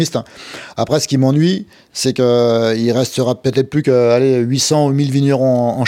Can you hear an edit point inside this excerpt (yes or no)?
no